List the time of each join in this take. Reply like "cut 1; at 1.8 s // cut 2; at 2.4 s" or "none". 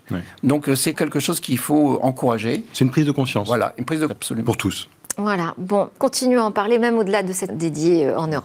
cut 1; at 0.9 s // cut 2; at 4.1 s // cut 3; at 6.0 s // cut 4; at 7.5 s